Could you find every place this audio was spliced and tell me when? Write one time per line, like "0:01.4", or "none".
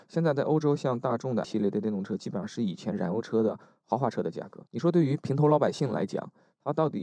0:01.4
0:04.7